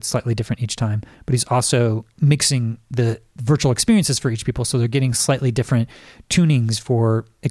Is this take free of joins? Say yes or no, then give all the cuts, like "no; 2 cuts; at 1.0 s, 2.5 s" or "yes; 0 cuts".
yes; 0 cuts